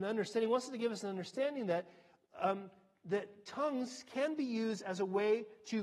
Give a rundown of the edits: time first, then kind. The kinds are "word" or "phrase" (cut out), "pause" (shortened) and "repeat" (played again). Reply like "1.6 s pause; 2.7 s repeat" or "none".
none